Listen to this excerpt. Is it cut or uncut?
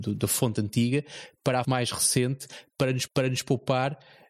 cut